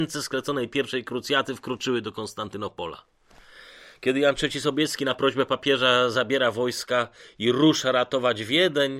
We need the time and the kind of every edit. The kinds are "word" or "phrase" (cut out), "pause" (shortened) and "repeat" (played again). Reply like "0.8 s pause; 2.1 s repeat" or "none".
none